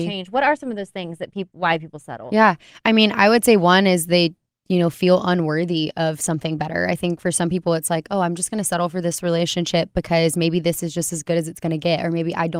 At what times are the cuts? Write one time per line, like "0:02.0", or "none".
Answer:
none